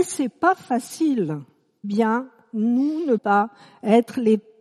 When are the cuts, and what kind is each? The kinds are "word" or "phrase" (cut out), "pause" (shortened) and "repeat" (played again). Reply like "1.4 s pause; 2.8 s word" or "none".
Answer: 1.8 s word; 3.2 s word